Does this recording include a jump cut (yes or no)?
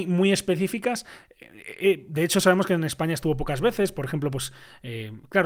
no